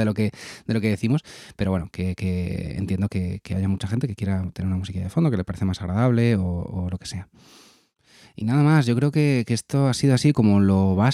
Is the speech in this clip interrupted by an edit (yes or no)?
no